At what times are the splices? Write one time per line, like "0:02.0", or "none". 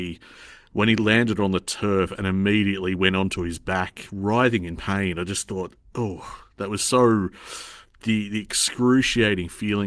none